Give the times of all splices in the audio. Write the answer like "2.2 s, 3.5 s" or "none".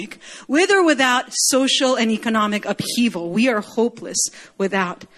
none